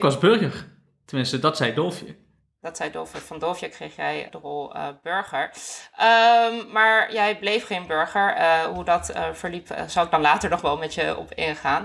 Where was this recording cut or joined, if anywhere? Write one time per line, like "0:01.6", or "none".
0:04.3